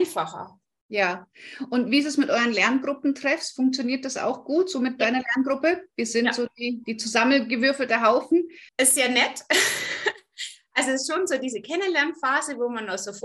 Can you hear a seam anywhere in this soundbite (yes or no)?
yes